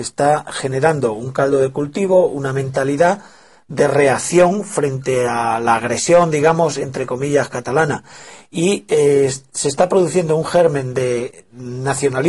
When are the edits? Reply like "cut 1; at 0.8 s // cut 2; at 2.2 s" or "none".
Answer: none